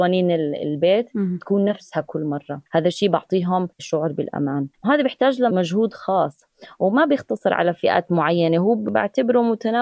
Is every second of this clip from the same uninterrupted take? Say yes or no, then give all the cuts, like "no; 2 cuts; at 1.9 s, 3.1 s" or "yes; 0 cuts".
no; 3 cuts; at 2.7 s, 3.7 s, 4.7 s